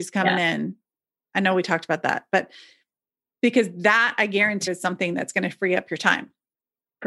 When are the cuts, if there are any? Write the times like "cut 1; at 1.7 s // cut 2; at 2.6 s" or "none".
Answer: cut 1; at 4.7 s